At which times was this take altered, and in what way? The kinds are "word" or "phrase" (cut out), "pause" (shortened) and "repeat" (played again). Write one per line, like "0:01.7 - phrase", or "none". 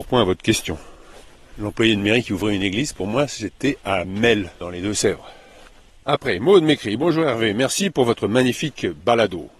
none